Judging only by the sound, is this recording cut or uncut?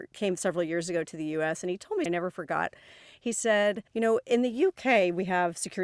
cut